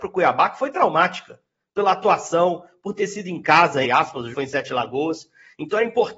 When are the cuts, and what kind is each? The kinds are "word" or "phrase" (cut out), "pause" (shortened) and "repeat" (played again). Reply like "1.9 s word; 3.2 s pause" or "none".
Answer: 3.8 s word; 4.3 s word